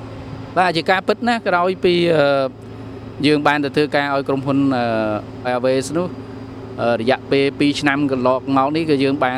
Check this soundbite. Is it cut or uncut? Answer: cut